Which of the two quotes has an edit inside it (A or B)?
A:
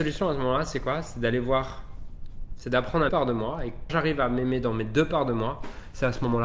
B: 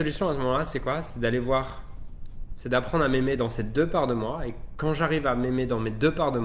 A